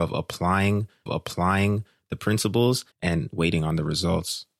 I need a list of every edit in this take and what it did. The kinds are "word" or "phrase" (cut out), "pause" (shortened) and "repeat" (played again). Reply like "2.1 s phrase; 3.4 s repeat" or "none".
1.1 s repeat; 2.9 s pause